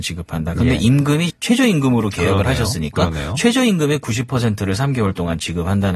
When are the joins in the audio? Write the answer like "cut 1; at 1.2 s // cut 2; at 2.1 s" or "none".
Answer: cut 1; at 1.3 s